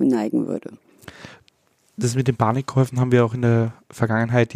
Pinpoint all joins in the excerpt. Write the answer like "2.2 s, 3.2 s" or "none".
none